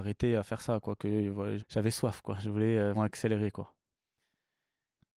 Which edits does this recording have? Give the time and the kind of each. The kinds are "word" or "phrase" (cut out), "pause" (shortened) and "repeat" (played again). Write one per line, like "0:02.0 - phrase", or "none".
0:01.6 - word
0:02.9 - word